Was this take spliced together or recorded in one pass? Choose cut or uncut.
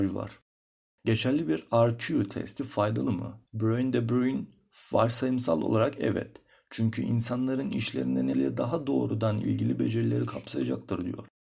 cut